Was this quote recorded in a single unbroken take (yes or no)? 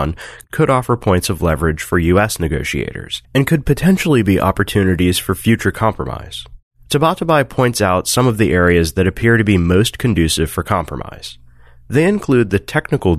no